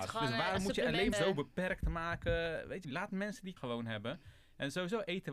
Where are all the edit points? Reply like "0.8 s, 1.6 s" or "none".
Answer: 1.1 s, 2.8 s, 3.6 s